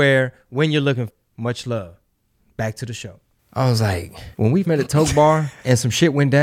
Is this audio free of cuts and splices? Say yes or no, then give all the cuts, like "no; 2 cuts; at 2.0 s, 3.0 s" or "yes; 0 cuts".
no; 3 cuts; at 1.1 s, 4.3 s, 4.6 s